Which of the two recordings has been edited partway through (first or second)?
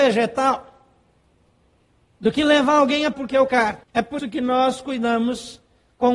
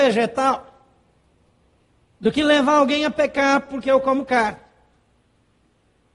first